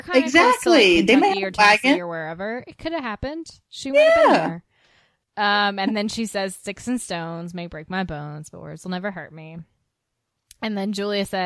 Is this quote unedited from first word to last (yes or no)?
yes